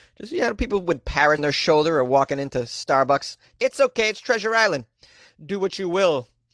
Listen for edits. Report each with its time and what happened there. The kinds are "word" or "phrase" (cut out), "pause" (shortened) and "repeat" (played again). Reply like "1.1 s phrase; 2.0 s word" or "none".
1.4 s word; 3.6 s word

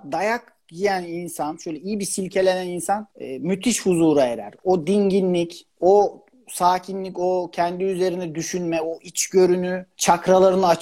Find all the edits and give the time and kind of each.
3.1 s pause; 5.7 s pause

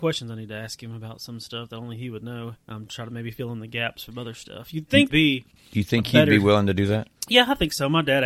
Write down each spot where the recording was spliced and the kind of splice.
2.6 s pause; 5.1 s phrase; 7.2 s pause

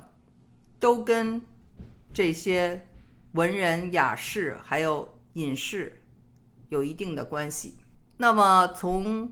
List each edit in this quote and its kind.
none

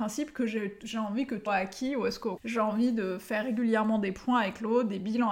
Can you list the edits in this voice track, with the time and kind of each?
1.5 s word; 2.4 s word

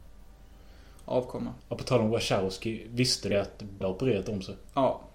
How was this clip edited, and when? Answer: 1.6 s pause; 3.3 s word; 3.8 s word

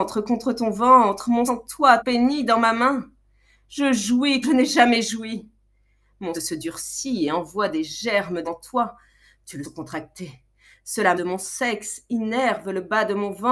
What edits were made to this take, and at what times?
1.5 s word; 2.0 s word; 4.4 s word; 6.3 s word; 8.4 s word; 9.6 s word; 11.1 s word

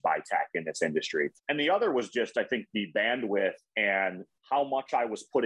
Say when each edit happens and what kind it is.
1.4 s pause

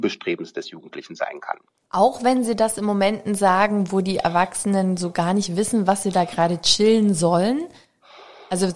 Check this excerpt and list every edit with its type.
none

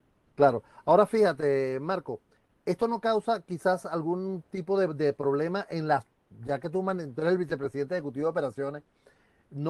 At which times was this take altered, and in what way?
none

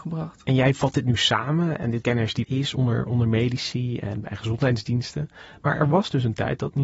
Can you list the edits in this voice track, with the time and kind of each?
2.0 s word; 2.4 s word

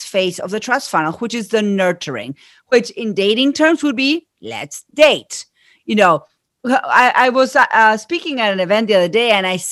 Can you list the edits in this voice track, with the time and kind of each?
none

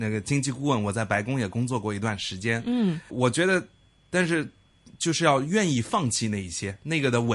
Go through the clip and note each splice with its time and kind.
3.1 s word

